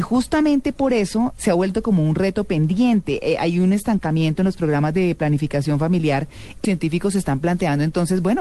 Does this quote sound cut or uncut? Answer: cut